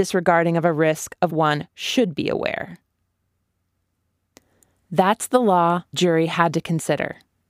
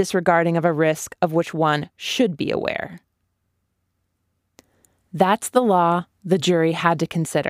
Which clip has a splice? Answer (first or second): first